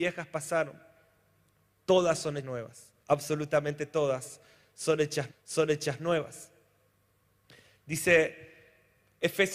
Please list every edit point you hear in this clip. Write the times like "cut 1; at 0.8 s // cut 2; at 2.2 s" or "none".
cut 1; at 2.4 s // cut 2; at 3.0 s // cut 3; at 5.3 s